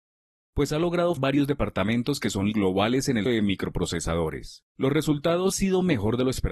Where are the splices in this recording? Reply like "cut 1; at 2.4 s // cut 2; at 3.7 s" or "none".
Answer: cut 1; at 1.2 s // cut 2; at 2.5 s // cut 3; at 3.3 s // cut 4; at 4.7 s // cut 5; at 5.5 s

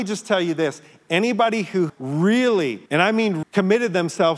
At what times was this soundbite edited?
cut 1; at 1.9 s // cut 2; at 2.9 s // cut 3; at 3.4 s

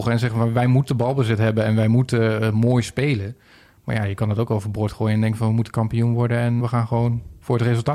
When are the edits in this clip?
cut 1; at 6.6 s

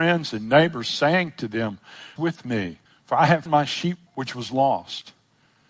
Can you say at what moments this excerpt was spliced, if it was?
cut 1; at 2.2 s // cut 2; at 2.9 s // cut 3; at 3.5 s // cut 4; at 4.1 s

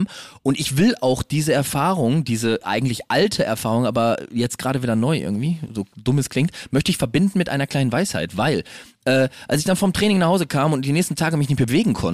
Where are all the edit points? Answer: none

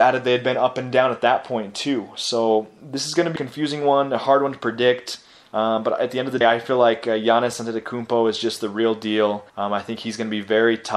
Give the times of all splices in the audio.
cut 1; at 3.4 s // cut 2; at 6.4 s // cut 3; at 9.5 s

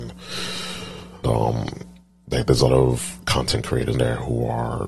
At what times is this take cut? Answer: cut 1; at 1.2 s // cut 2; at 2.1 s // cut 3; at 2.7 s // cut 4; at 3.9 s

